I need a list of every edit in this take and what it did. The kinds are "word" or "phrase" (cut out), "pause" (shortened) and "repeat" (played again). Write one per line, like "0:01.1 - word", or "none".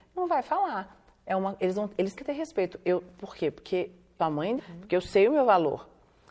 0:02.2 - word
0:04.2 - word
0:04.6 - word